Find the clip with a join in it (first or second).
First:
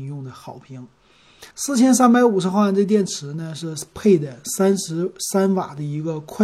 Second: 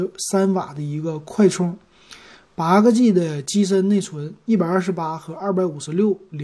first